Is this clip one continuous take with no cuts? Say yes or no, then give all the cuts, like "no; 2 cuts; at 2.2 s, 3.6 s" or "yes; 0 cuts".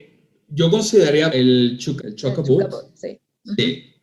no; 2 cuts; at 1.3 s, 2.0 s